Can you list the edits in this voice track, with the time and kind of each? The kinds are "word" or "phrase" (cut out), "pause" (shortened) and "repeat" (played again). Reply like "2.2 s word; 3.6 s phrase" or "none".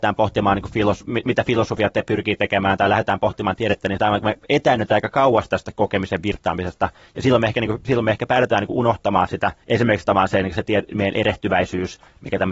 9.6 s pause